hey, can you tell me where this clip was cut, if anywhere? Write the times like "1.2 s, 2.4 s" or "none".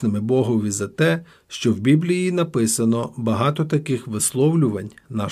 none